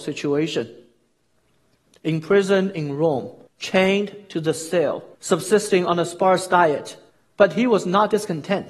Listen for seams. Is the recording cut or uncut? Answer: cut